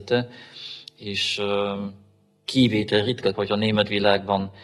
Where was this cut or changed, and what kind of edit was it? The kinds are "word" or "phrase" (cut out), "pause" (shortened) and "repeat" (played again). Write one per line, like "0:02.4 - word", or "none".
0:03.3 - word